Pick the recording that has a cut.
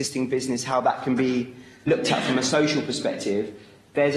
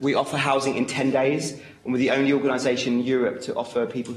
first; 1 cut; at 1.9 s

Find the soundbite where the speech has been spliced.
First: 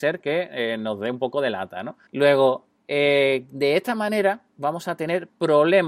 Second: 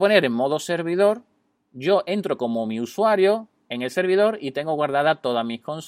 first; 1 cut; at 2.1 s

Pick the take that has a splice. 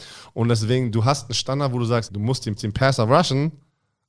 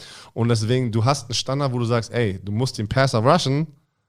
first; 2 cuts; at 2.1 s, 2.6 s

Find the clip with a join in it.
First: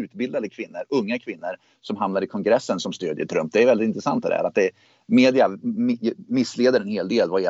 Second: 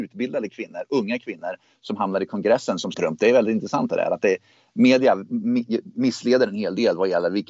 second; 1 cut; at 2.9 s

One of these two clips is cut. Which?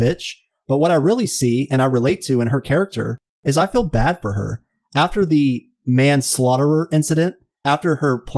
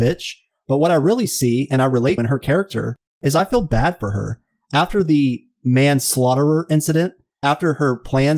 second; 1 cut; at 2.2 s

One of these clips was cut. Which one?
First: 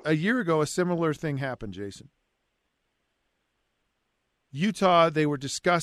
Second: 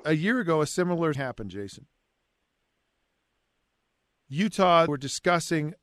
second; 2 cuts; at 1.1 s, 4.9 s

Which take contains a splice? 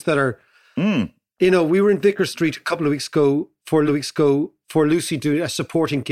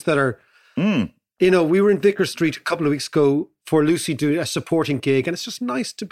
first; 1 cut; at 3.9 s

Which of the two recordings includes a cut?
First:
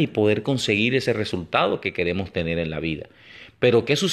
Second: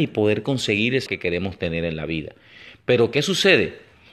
second; 1 cut; at 1.1 s

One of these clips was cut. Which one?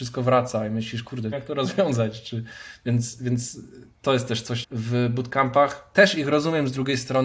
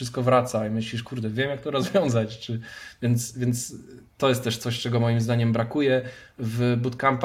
first; 2 cuts; at 1.3 s, 4.6 s

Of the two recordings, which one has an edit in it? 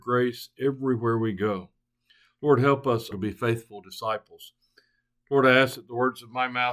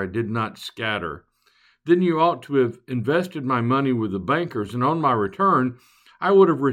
first; 1 cut; at 3.1 s

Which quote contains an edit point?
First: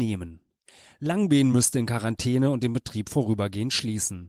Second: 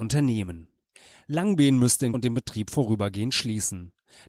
second; 1 cut; at 2.1 s

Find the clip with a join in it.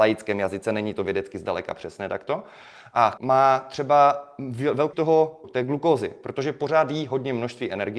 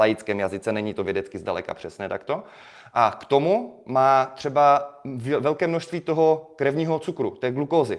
first; 3 cuts; at 3.2 s, 4.9 s, 5.4 s

